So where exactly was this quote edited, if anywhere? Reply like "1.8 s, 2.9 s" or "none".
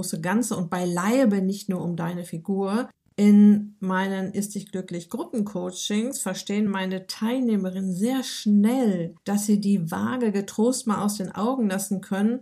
none